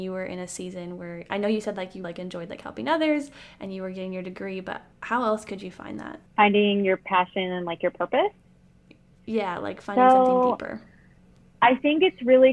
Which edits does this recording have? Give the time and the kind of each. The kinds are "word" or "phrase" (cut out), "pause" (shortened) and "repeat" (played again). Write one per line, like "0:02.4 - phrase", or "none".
0:02.0 - word
0:04.9 - pause
0:06.3 - pause